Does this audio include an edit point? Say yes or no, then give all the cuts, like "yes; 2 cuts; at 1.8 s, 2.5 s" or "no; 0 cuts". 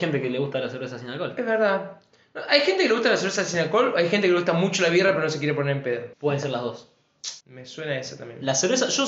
yes; 2 cuts; at 6.1 s, 7.4 s